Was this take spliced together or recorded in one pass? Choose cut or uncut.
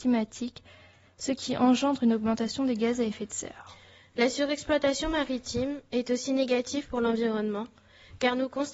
uncut